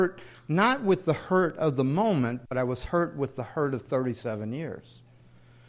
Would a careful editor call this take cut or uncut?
uncut